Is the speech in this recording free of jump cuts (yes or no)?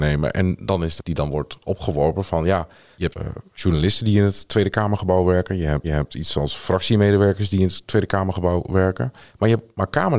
no